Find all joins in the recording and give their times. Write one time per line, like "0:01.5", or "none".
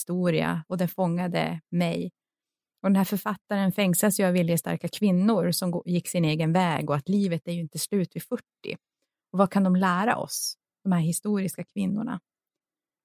none